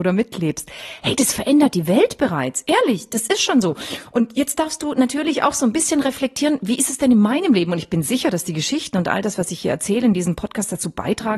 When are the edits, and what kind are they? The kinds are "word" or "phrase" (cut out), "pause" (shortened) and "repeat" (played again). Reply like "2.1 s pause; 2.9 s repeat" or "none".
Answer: none

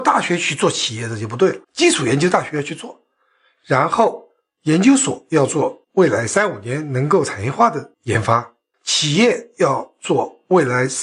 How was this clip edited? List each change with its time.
1.6 s pause; 5.8 s pause; 8.7 s pause

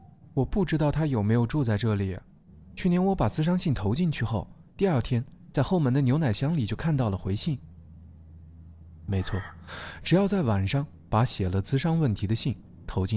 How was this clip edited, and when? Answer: none

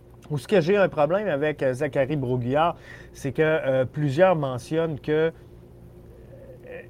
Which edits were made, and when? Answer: none

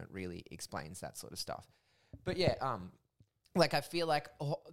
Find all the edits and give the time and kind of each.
none

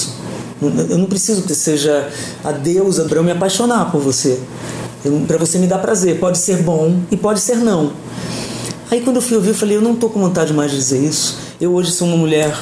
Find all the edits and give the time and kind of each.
1.5 s word; 3.1 s word; 5.3 s word

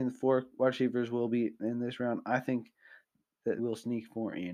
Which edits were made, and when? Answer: 3.6 s word

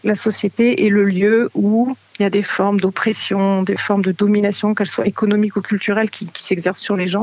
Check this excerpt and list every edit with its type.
none

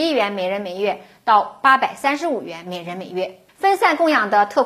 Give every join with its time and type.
3.5 s pause

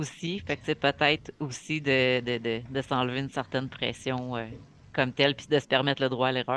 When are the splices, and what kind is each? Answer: none

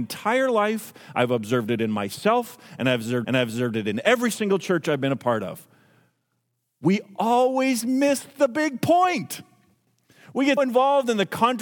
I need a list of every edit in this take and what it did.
3.2 s repeat; 10.6 s word

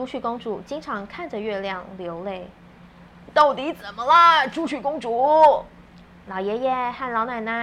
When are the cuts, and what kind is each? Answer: none

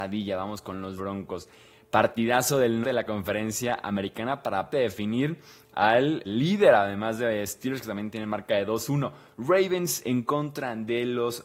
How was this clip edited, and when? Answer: 1.0 s word; 2.8 s word; 4.7 s word; 6.2 s word

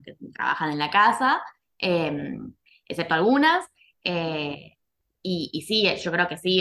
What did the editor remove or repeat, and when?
none

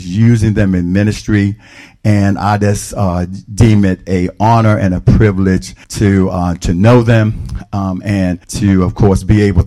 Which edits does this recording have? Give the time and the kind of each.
5.8 s pause; 8.4 s pause

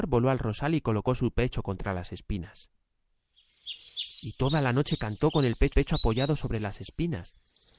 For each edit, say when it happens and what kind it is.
5.7 s repeat

